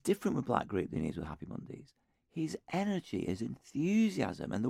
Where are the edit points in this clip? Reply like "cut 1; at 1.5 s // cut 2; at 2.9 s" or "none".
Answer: none